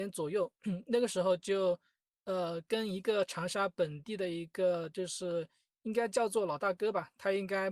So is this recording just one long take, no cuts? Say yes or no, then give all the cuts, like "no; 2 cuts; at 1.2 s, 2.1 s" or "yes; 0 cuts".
yes; 0 cuts